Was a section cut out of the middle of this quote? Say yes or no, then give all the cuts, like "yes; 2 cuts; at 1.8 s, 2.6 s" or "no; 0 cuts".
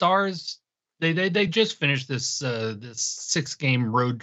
no; 0 cuts